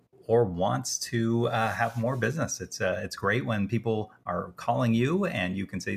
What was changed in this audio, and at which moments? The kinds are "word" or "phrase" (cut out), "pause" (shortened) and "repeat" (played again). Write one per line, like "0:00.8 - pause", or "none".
none